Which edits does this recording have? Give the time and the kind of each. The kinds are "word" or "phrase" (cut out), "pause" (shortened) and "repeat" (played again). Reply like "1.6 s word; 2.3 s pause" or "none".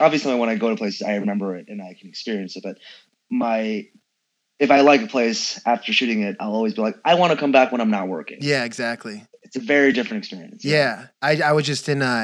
none